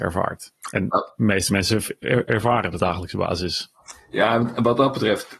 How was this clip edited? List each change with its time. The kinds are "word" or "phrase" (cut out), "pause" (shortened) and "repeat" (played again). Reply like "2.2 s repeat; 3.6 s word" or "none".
2.3 s word; 2.8 s phrase